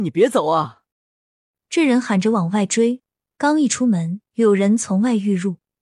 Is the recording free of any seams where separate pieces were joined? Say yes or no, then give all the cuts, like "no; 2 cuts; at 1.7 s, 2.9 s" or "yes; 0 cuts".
no; 1 cut; at 0.9 s